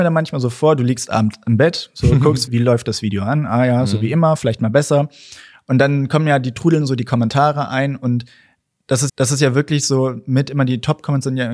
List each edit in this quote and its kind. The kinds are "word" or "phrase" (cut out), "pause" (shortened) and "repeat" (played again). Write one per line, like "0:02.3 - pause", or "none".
0:02.5 - word
0:09.1 - repeat